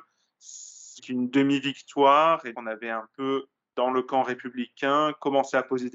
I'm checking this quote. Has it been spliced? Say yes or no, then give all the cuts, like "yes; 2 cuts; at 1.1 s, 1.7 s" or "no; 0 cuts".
yes; 2 cuts; at 1.0 s, 2.5 s